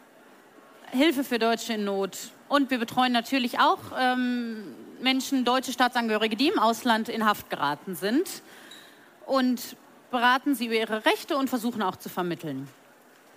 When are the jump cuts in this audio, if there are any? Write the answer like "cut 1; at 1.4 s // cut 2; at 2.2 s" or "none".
none